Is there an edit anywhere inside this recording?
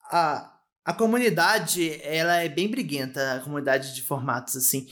no; 0 cuts

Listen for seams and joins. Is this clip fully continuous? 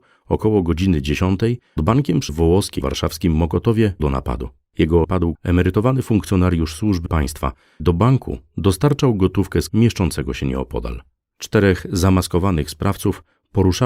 no; 9 cuts; at 1.8 s, 2.3 s, 2.8 s, 4.0 s, 5.0 s, 5.3 s, 7.1 s, 7.8 s, 9.7 s

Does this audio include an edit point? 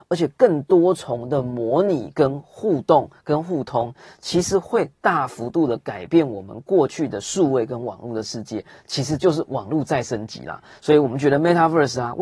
no; 0 cuts

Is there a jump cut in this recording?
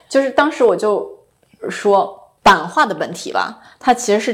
yes; 1 cut; at 2.4 s

